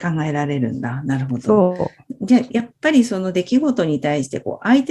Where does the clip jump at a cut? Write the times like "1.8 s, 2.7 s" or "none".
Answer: none